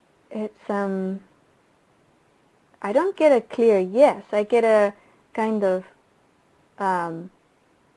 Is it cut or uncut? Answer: uncut